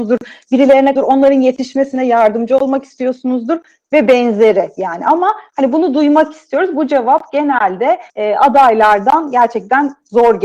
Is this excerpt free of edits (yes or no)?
no